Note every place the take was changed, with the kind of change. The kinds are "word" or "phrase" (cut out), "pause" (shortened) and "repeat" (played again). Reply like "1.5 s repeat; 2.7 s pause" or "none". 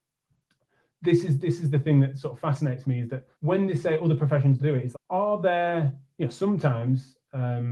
3.3 s pause; 4.6 s word; 4.9 s word